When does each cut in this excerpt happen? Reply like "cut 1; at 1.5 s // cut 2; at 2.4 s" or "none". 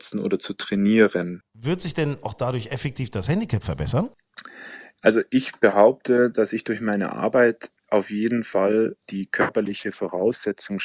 cut 1; at 1.5 s // cut 2; at 9.0 s

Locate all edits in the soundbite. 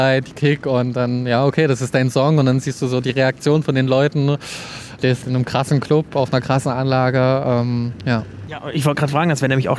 cut 1; at 5.2 s

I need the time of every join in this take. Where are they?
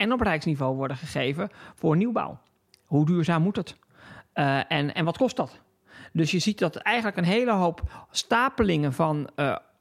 none

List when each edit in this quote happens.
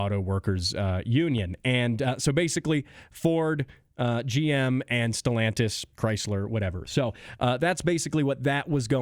none

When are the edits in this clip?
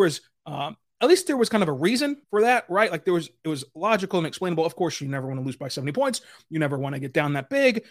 cut 1; at 2.2 s

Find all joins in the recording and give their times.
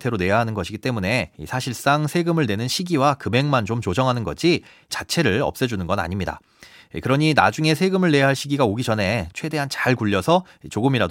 cut 1; at 1.3 s // cut 2; at 4.9 s

